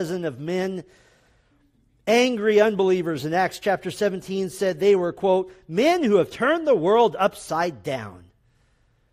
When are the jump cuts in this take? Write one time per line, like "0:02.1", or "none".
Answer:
none